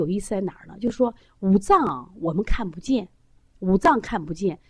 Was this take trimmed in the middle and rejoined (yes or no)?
no